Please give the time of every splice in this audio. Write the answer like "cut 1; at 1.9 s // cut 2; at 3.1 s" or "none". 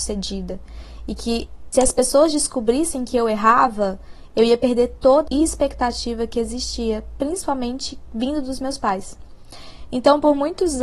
cut 1; at 1.7 s // cut 2; at 5.3 s